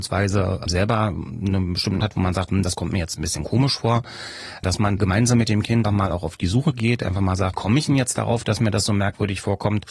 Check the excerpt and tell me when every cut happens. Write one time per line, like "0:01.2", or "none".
0:02.0
0:05.0
0:05.8
0:07.5